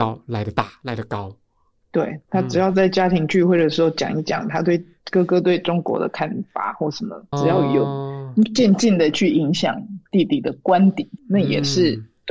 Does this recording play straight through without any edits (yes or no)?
no